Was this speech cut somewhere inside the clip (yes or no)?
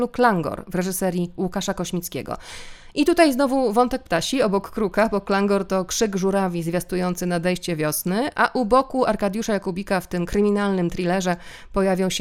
no